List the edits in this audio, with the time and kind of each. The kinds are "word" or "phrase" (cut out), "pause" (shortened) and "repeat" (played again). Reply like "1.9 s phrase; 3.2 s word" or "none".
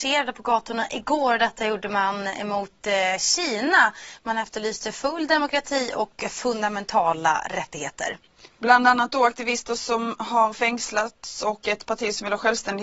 none